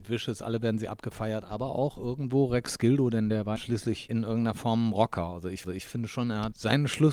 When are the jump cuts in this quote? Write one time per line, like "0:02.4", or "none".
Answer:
0:03.6
0:05.6